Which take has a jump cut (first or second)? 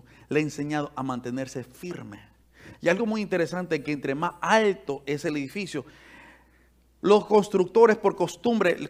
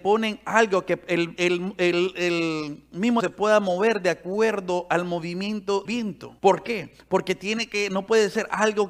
second